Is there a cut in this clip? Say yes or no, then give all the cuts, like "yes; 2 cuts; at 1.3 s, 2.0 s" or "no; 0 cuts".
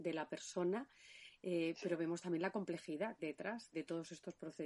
yes; 2 cuts; at 3.2 s, 3.7 s